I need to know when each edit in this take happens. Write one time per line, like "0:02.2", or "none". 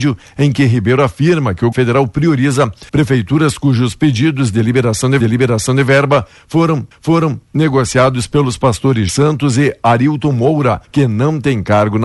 0:01.7
0:02.9
0:05.2
0:06.9
0:09.1
0:10.8